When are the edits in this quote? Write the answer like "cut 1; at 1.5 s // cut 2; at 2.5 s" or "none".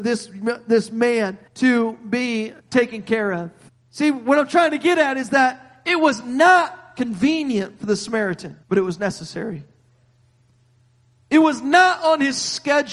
cut 1; at 1.5 s // cut 2; at 2.6 s // cut 3; at 3.7 s // cut 4; at 8.6 s